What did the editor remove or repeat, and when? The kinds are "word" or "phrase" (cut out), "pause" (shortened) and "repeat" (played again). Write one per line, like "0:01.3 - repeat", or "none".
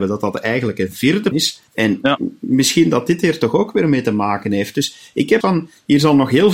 0:01.3 - word
0:01.7 - pause
0:05.4 - word